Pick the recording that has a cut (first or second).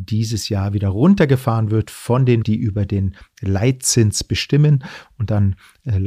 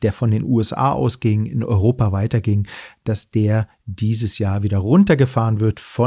first